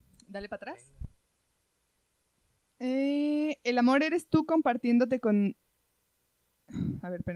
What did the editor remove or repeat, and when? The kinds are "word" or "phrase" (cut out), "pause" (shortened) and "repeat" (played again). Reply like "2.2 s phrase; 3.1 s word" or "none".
none